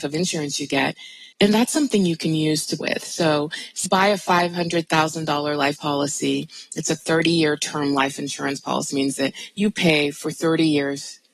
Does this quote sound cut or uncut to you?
cut